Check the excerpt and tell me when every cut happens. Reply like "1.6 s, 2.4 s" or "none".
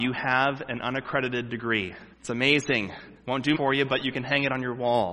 2.1 s, 3.2 s, 3.5 s